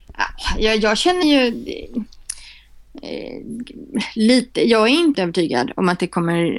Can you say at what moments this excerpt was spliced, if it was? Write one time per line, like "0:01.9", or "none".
0:01.2
0:05.1